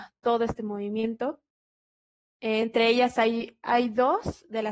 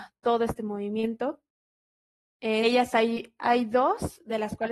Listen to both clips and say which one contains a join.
second; 1 cut; at 2.6 s

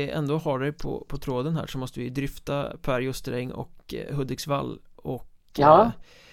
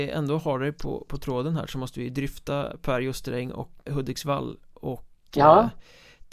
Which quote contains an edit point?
second; 1 cut; at 3.9 s

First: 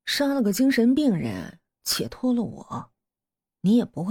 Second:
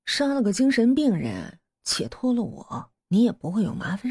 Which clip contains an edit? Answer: second; 1 cut; at 3.0 s

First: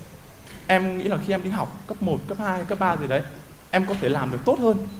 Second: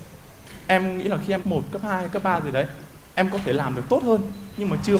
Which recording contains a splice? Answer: second; 1 cut; at 1.4 s

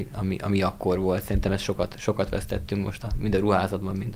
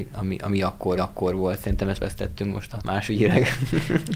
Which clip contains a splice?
second; 3 cuts; at 1.0 s, 1.9 s, 2.8 s

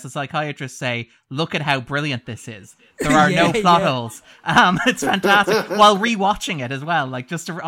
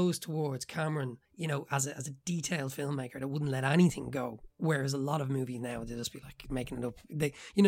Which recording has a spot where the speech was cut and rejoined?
second; 1 cut; at 1.3 s

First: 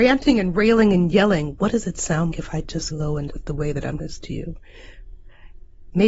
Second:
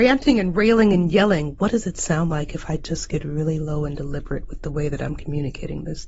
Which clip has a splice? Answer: first; 4 cuts; at 2.3 s, 2.9 s, 3.3 s, 4.0 s

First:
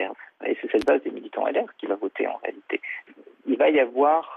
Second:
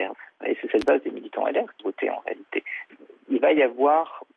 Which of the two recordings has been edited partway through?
second; 1 cut; at 1.8 s

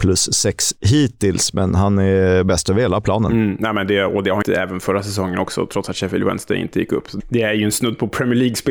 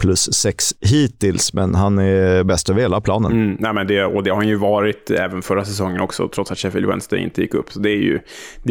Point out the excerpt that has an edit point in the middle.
first; 2 cuts; at 4.4 s, 7.2 s

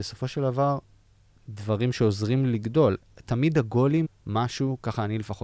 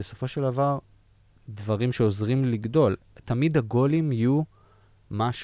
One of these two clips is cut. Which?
first; 1 cut; at 4.0 s

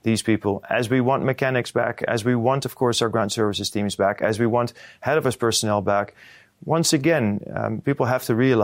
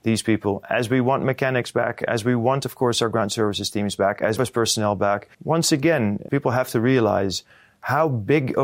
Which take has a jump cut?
second; 3 cuts; at 4.4 s, 5.3 s, 6.3 s

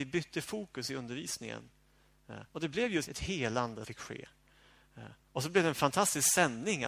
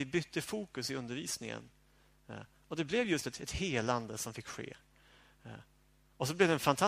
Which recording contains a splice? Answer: first; 4 cuts; at 2.5 s, 3.1 s, 3.8 s, 5.2 s

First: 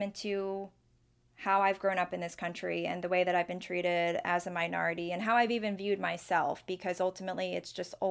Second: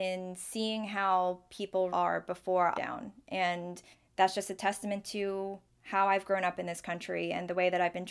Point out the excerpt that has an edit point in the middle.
second; 4 cuts; at 1.9 s, 2.7 s, 3.9 s, 5.7 s

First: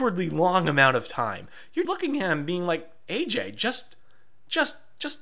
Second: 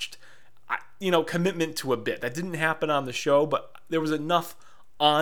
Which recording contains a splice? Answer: first; 1 cut; at 1.8 s

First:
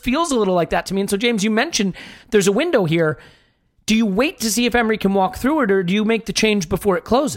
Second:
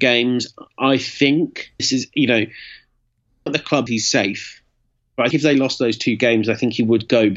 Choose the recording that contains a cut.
second; 4 cuts; at 1.8 s, 3.5 s, 3.9 s, 5.3 s

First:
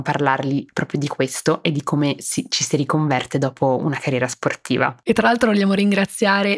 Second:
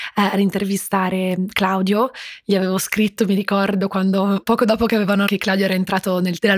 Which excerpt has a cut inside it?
second; 2 cuts; at 4.4 s, 5.3 s

